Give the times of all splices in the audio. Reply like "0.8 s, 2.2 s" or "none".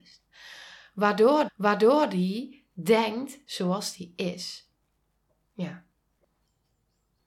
1.5 s, 3.5 s